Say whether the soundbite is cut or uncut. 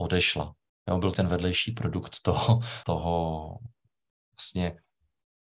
cut